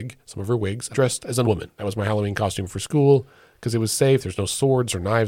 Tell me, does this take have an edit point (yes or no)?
yes